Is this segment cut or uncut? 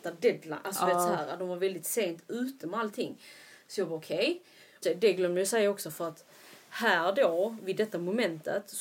cut